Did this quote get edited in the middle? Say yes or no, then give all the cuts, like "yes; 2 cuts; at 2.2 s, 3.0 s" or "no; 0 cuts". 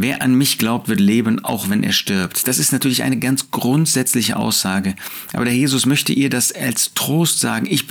no; 0 cuts